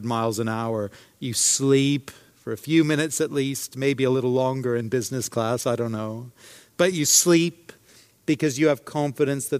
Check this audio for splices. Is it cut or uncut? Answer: uncut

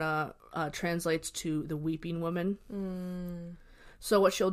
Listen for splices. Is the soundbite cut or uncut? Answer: uncut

